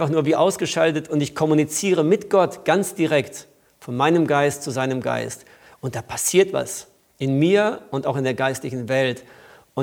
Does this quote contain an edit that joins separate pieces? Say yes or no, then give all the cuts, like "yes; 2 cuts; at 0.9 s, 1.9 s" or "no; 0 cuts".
no; 0 cuts